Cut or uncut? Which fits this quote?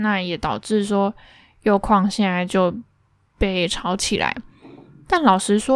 uncut